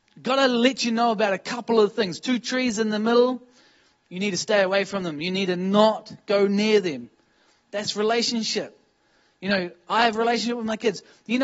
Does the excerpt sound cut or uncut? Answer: uncut